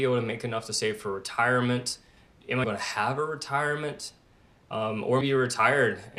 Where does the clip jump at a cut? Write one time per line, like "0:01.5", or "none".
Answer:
0:02.6
0:05.2